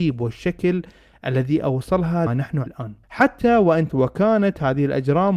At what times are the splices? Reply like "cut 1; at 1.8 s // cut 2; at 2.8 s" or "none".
cut 1; at 2.3 s // cut 2; at 2.7 s // cut 3; at 3.0 s // cut 4; at 3.9 s